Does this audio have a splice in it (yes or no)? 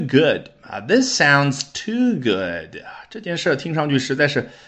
no